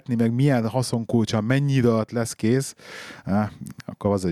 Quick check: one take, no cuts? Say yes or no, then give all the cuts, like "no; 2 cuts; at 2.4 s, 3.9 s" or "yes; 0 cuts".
yes; 0 cuts